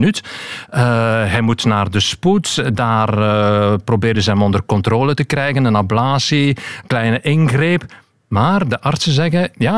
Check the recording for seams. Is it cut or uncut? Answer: uncut